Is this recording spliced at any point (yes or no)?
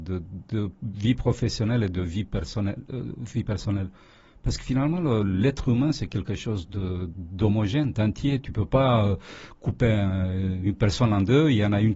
no